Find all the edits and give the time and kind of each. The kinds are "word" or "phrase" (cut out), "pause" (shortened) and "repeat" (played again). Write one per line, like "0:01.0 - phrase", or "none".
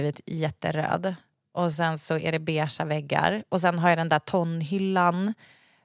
none